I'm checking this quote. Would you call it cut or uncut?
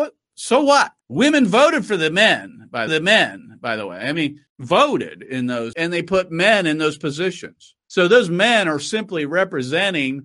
cut